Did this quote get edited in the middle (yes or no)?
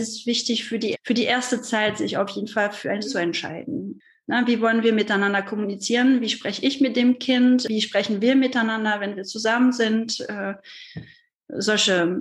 yes